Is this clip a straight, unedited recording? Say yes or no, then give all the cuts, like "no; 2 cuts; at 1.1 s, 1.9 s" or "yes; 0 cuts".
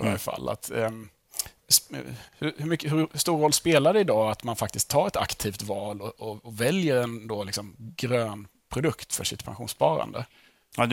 no; 1 cut; at 2.3 s